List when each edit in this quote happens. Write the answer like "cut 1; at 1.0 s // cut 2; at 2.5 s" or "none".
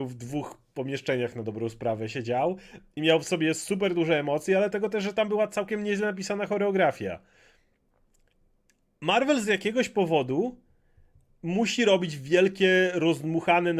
none